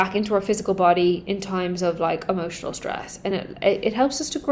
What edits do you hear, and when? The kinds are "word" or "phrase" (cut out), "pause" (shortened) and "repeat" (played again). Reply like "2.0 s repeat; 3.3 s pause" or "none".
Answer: none